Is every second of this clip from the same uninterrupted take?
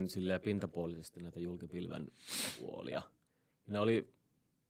yes; 0 cuts

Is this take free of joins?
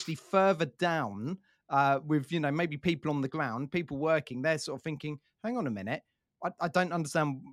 yes; 0 cuts

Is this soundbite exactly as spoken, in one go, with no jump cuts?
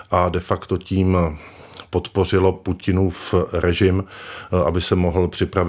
yes; 0 cuts

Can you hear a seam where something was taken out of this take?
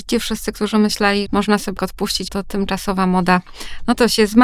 yes; 3 cuts; at 1.3 s, 1.8 s, 2.3 s

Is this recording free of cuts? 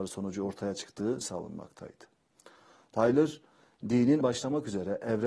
no; 2 cuts; at 1.2 s, 4.2 s

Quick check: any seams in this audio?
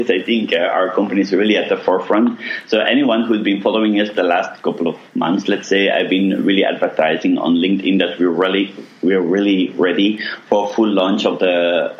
no; 0 cuts

